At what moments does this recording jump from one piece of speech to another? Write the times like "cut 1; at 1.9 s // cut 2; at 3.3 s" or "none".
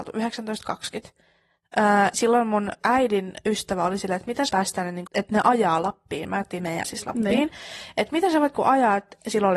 cut 1; at 2.1 s // cut 2; at 2.8 s // cut 3; at 4.5 s // cut 4; at 5.1 s // cut 5; at 6.8 s // cut 6; at 8.5 s